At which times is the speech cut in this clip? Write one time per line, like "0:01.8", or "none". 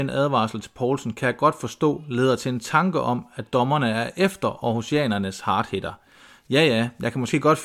none